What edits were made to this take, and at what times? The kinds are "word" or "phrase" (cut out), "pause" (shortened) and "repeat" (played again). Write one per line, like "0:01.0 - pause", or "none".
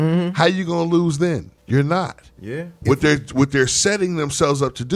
0:01.6 - pause